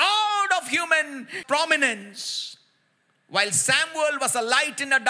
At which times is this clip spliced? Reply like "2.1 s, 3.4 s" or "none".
none